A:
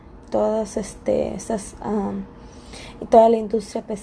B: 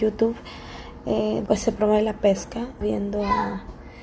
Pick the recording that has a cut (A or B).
B